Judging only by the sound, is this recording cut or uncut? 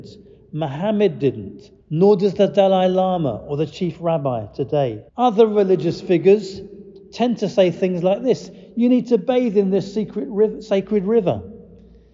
cut